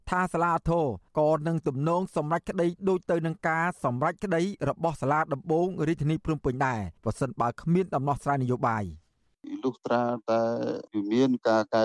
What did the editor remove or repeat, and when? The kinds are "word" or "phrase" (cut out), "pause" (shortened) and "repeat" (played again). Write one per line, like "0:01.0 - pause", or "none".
0:01.1 - pause
0:07.0 - pause